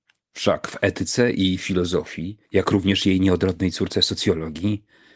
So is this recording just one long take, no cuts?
no; 1 cut; at 2.4 s

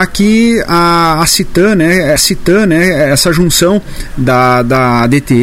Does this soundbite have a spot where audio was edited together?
yes; 1 cut; at 2.2 s

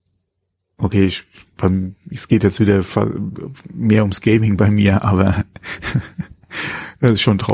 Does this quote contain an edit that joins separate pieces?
no; 0 cuts

